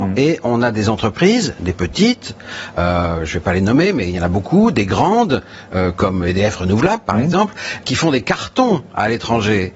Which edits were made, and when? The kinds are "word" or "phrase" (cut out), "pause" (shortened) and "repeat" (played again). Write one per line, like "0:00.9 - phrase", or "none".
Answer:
0:07.8 - word